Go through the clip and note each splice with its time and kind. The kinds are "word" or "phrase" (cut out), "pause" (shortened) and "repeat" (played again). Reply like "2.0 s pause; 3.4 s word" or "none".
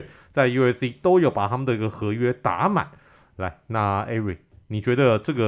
none